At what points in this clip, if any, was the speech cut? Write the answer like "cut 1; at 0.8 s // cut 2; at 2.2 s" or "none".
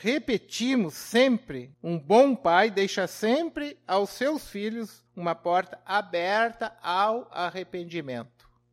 cut 1; at 1.7 s // cut 2; at 5.1 s